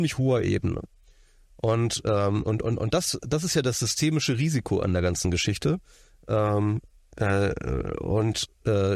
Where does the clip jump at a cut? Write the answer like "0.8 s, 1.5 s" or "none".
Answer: none